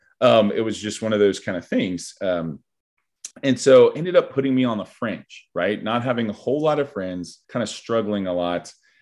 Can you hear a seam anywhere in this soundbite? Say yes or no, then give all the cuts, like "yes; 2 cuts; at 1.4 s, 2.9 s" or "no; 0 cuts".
yes; 2 cuts; at 3.3 s, 7.4 s